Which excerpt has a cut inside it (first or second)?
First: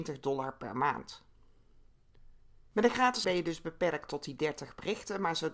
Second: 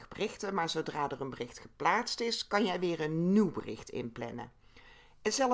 first